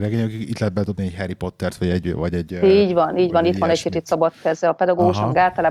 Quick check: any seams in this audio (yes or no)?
no